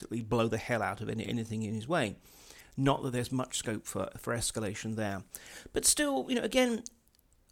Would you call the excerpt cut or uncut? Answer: uncut